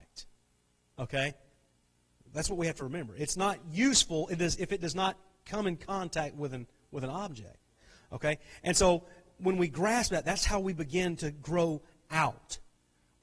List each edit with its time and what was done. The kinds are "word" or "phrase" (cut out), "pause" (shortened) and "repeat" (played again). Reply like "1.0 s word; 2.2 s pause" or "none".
none